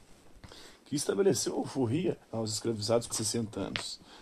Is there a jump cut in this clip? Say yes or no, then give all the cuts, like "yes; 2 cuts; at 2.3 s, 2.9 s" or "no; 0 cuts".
yes; 2 cuts; at 2.2 s, 3.1 s